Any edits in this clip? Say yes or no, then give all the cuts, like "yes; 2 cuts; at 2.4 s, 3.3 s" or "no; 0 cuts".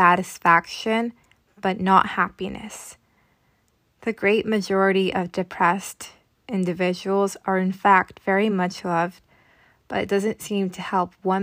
no; 0 cuts